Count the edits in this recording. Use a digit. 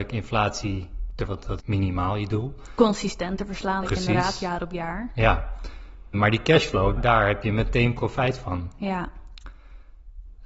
5